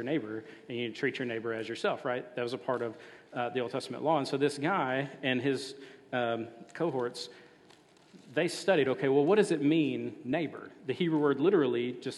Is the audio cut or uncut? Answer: uncut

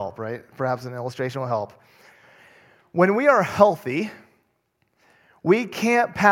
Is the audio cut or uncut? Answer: uncut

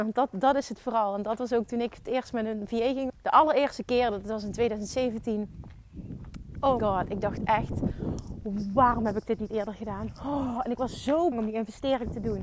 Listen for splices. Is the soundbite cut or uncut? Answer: cut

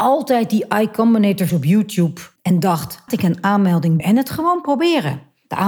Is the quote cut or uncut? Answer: cut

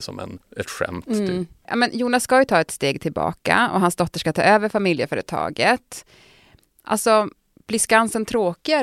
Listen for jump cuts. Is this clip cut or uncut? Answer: uncut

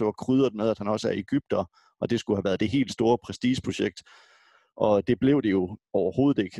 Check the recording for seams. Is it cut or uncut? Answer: uncut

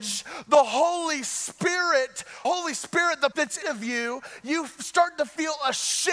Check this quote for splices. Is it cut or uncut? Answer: cut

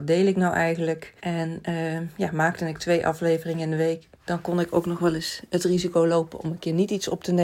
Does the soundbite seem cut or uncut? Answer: cut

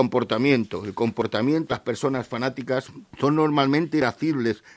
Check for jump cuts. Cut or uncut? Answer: cut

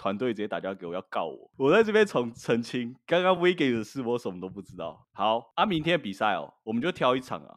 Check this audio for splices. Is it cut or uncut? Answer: uncut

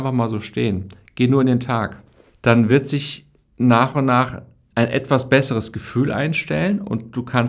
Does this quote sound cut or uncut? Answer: uncut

